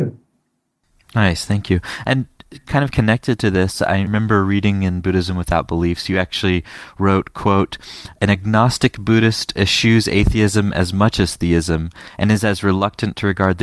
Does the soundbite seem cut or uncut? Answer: uncut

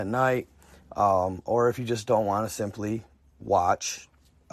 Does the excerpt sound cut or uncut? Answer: uncut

